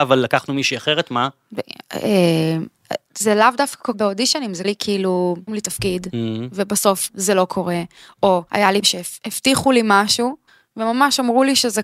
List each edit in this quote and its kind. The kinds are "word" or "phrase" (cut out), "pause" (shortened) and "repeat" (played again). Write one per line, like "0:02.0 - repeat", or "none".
0:03.1 - pause
0:03.9 - phrase
0:04.6 - word
0:05.5 - word
0:07.1 - word
0:08.5 - pause
0:08.8 - word
0:10.5 - pause

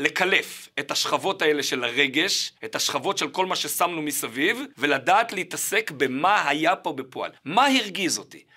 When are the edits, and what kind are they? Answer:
0:02.6 - pause
0:04.7 - pause
0:07.4 - pause

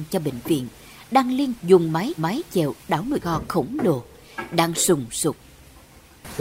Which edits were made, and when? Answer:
0:01.6 - word
0:02.2 - repeat
0:03.2 - word
0:04.7 - word

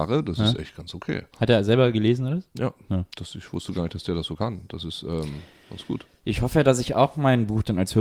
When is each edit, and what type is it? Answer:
0:01.3 - pause
0:03.1 - pause

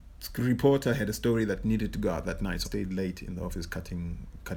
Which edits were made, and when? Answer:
0:02.6 - word

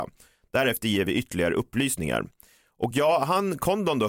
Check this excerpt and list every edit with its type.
none

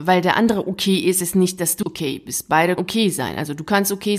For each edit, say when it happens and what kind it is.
0:01.2 - word
0:01.8 - word
0:02.8 - word

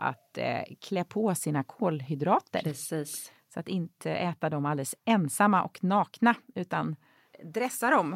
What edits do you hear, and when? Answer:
none

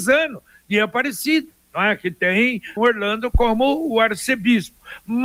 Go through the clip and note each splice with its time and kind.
0:02.8 - word

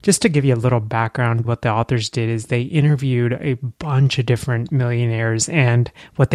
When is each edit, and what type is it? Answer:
0:01.4 - word

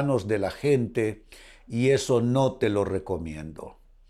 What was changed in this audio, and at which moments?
none

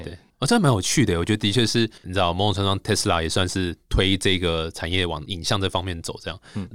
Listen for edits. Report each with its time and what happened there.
0:02.0 - pause

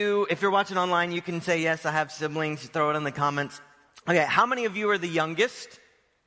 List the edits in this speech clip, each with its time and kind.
none

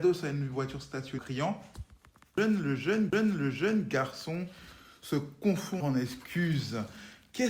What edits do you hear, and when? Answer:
0:01.2 - word
0:03.1 - repeat
0:05.8 - word

